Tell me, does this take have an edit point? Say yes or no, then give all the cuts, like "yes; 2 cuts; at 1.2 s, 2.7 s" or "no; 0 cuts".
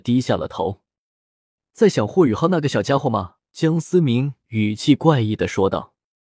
yes; 1 cut; at 3.5 s